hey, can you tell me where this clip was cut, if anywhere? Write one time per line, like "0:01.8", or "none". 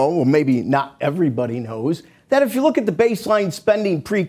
none